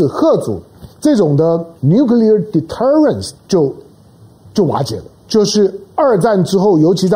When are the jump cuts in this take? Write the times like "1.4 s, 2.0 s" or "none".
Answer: 0.9 s, 1.8 s, 3.4 s, 5.2 s